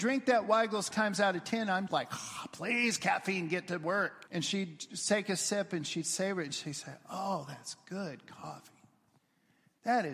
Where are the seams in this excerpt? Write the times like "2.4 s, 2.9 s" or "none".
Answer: 0.9 s, 1.9 s, 4.3 s